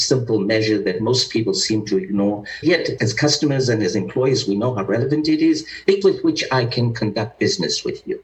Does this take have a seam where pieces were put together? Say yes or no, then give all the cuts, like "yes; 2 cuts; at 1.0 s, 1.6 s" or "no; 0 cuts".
yes; 3 cuts; at 2.6 s, 3.0 s, 6.0 s